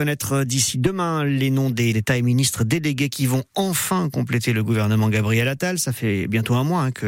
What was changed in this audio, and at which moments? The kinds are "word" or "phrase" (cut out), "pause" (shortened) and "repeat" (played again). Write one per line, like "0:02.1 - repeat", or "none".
0:01.9 - word

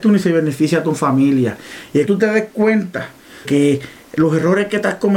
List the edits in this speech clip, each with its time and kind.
0:02.1 - word
0:03.4 - word

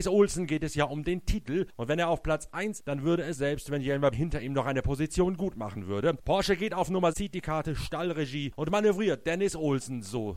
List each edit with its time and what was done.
0:02.8 - word
0:03.3 - word
0:04.1 - word
0:07.1 - word

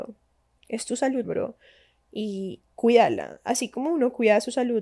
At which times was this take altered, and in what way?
0:01.2 - word

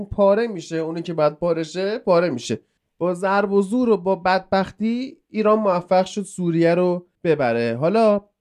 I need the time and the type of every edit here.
0:02.8 - pause
0:07.1 - pause

